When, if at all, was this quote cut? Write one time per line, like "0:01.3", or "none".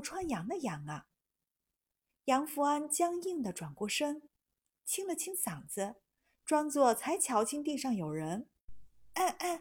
none